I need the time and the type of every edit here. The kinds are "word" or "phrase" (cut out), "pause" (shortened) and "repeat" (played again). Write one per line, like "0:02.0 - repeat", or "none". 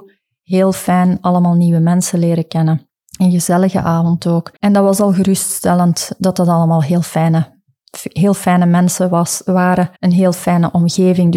0:03.0 - pause
0:04.6 - pause
0:10.0 - pause